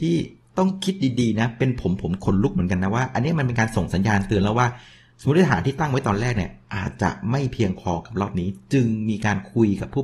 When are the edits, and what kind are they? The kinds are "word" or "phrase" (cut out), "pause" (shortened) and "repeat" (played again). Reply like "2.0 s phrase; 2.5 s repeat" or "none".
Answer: none